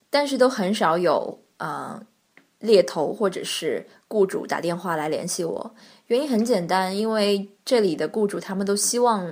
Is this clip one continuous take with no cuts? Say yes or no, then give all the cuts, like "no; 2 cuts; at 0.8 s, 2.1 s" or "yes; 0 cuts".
yes; 0 cuts